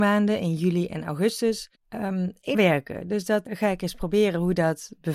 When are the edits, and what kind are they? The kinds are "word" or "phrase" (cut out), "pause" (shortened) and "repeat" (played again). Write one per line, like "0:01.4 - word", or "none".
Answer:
0:01.7 - pause
0:02.5 - phrase
0:03.4 - word